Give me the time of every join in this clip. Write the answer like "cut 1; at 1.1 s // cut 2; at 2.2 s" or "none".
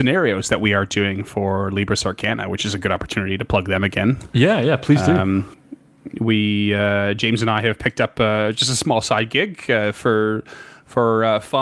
none

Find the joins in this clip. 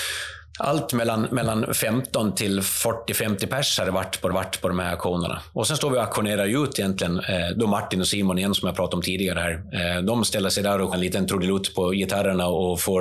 cut 1; at 4.3 s // cut 2; at 10.9 s

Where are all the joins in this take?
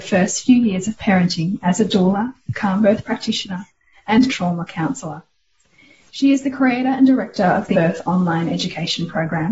cut 1; at 4.3 s // cut 2; at 7.7 s

